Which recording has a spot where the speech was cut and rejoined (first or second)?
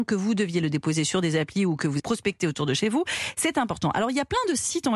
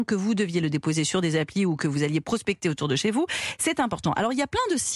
first